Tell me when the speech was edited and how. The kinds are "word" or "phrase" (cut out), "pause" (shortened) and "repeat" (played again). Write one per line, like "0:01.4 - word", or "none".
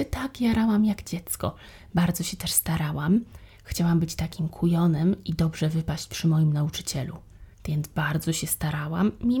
0:07.5 - pause